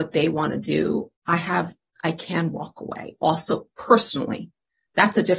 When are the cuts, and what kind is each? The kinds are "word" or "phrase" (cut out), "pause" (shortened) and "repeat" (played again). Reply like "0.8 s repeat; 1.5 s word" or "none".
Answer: 1.2 s pause; 1.9 s pause